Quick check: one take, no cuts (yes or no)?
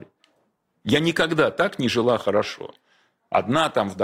yes